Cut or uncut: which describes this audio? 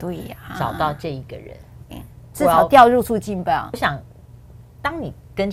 cut